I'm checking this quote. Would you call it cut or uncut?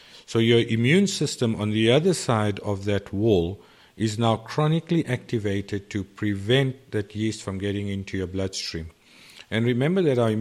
uncut